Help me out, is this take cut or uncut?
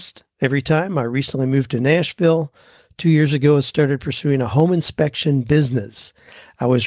uncut